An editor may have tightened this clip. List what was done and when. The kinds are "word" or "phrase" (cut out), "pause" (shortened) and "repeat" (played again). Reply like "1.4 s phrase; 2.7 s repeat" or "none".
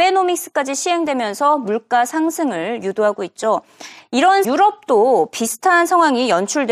4.4 s word